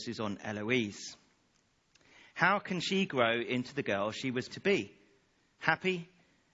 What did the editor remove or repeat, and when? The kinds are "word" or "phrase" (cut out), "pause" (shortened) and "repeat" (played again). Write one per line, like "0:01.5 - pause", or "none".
0:04.5 - word